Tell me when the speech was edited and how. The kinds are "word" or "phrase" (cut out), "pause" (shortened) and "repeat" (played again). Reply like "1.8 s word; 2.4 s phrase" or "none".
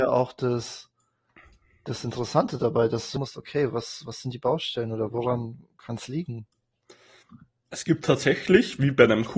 3.2 s phrase